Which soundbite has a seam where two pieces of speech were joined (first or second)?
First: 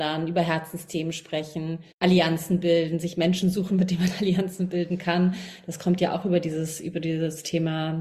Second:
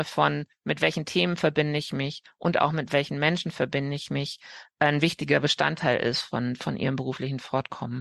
first